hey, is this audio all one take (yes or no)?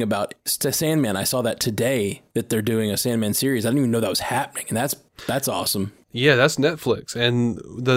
yes